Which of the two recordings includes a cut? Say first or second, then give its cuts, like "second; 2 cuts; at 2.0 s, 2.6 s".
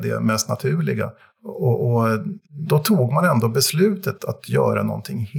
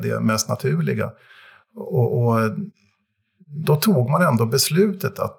first; 3 cuts; at 1.2 s, 2.4 s, 4.2 s